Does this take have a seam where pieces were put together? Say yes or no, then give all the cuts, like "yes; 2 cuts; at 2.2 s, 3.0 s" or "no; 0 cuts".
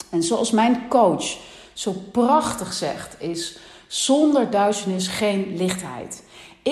no; 0 cuts